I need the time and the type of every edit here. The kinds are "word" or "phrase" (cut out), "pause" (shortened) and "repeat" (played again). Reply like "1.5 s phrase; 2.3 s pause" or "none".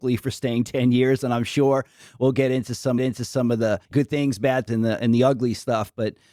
3.0 s repeat; 3.8 s pause